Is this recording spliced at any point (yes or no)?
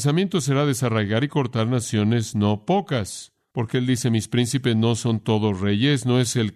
no